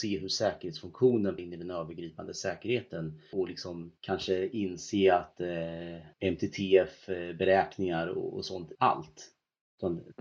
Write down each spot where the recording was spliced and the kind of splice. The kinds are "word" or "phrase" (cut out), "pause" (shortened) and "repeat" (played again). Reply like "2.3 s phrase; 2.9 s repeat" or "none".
1.4 s word; 3.3 s word; 4.0 s pause; 6.1 s pause; 8.7 s phrase